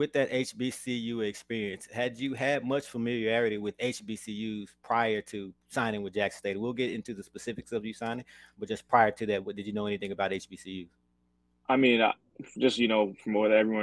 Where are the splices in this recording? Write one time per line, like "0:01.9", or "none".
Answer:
none